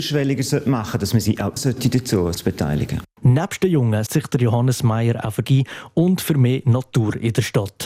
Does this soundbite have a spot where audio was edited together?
yes; 4 cuts; at 1.6 s, 2.3 s, 4.1 s, 5.4 s

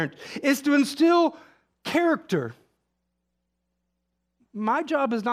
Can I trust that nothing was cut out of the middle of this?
yes; 0 cuts

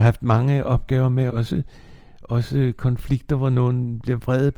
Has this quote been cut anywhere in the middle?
yes; 1 cut; at 1.3 s

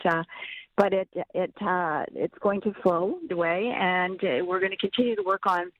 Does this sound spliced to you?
yes; 1 cut; at 3.3 s

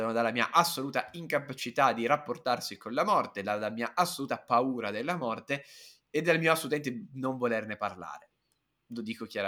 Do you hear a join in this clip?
no; 0 cuts

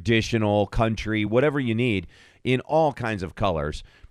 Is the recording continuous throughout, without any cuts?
yes; 0 cuts

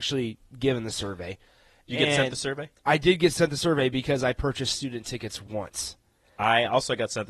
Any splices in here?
no; 0 cuts

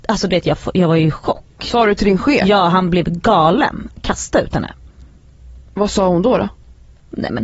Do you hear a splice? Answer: no; 0 cuts

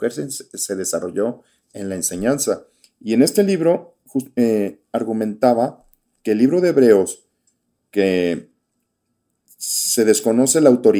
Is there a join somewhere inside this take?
no; 0 cuts

